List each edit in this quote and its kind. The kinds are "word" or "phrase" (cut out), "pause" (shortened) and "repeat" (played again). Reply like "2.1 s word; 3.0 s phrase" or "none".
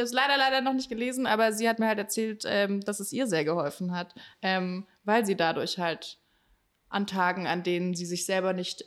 none